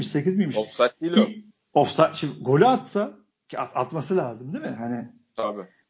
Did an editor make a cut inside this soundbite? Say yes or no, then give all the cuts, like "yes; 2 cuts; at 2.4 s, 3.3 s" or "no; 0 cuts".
no; 0 cuts